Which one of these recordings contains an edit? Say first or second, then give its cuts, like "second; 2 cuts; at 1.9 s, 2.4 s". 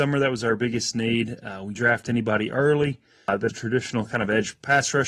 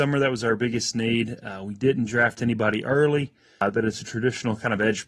first; 2 cuts; at 1.8 s, 3.5 s